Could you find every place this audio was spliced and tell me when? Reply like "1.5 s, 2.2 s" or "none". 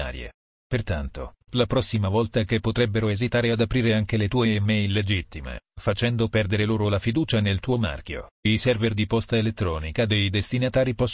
8.3 s